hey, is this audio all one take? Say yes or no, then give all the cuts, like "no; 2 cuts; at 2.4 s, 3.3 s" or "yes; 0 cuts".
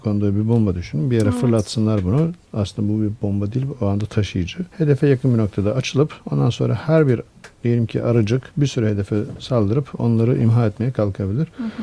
no; 3 cuts; at 4.7 s, 6.2 s, 8.5 s